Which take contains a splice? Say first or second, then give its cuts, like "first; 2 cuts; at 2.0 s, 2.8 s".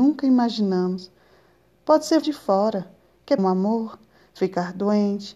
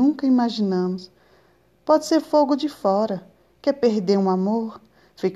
first; 2 cuts; at 2.2 s, 3.4 s